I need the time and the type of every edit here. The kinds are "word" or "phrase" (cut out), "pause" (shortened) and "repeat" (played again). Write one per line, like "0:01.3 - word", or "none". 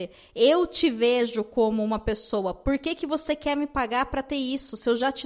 none